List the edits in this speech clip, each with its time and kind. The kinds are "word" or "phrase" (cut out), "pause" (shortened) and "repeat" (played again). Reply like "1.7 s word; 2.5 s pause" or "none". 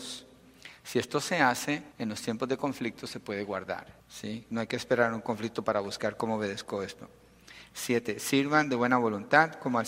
1.9 s pause; 4.0 s pause